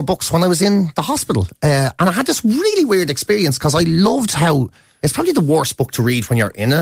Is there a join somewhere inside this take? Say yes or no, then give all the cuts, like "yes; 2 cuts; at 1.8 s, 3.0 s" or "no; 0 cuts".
no; 0 cuts